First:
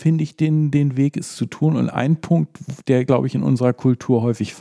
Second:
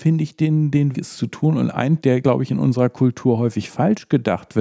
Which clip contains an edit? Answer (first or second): second